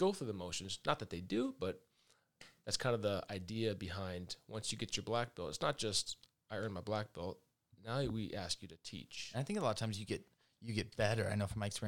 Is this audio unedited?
yes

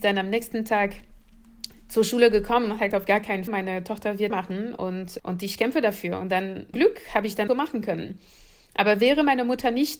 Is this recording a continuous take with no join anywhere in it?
no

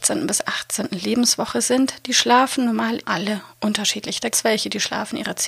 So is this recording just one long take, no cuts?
no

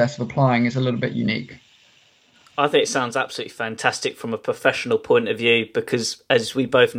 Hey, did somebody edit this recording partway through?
no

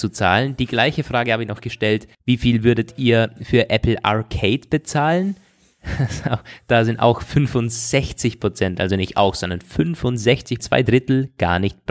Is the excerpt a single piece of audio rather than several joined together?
no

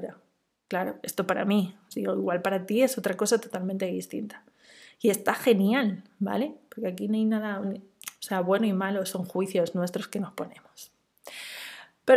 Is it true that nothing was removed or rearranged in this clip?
no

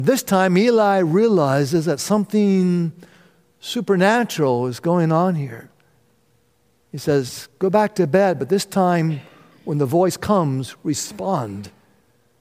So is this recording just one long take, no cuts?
yes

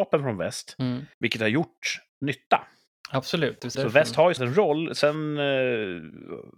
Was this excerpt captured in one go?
no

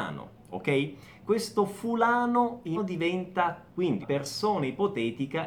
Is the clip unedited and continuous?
no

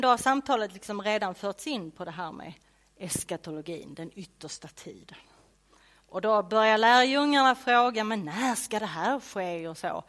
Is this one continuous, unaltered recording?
yes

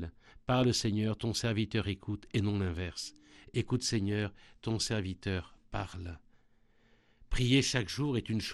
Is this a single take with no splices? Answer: yes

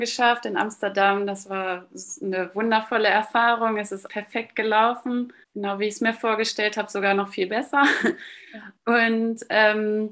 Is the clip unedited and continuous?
no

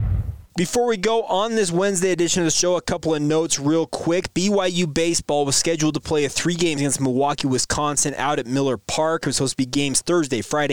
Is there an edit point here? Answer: yes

